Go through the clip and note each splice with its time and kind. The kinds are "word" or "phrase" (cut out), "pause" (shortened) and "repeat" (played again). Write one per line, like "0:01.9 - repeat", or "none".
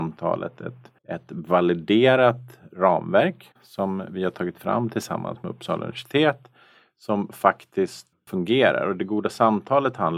0:01.0 - pause
0:08.1 - word